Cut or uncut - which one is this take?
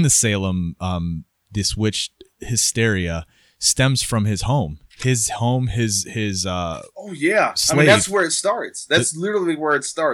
cut